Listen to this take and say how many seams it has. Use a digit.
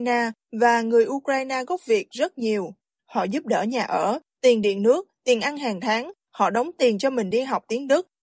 0